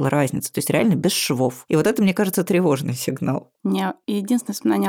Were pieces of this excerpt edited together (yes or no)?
no